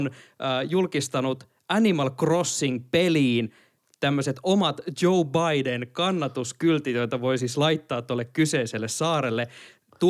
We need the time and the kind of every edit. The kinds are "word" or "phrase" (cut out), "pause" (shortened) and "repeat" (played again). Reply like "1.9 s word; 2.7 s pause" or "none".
none